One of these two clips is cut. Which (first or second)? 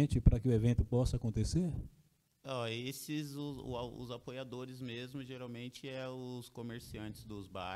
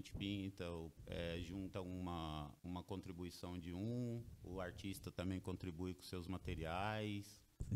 second